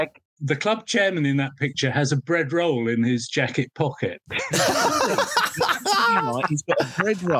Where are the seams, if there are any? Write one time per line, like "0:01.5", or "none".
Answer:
none